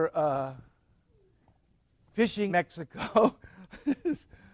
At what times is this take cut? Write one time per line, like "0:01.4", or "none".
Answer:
0:02.5